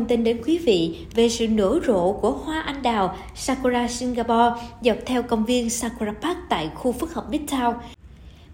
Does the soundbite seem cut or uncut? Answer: uncut